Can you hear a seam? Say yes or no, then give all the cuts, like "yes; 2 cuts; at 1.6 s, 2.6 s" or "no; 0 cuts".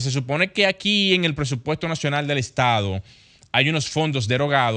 no; 0 cuts